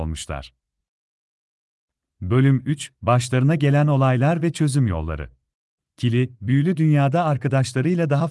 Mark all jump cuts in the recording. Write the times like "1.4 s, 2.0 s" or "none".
none